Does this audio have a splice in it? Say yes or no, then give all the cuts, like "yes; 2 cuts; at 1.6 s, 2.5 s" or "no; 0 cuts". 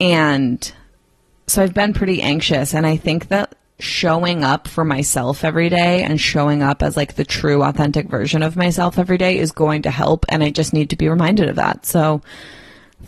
no; 0 cuts